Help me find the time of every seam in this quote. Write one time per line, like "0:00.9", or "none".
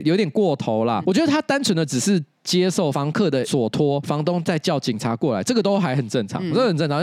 0:01.0